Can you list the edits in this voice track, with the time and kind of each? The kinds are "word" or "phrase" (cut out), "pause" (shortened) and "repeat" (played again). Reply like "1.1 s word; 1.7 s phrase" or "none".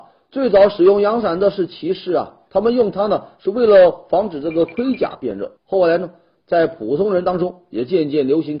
5.6 s pause